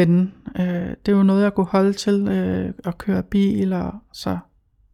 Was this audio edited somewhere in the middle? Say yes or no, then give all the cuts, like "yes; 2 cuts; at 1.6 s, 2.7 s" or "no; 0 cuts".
no; 0 cuts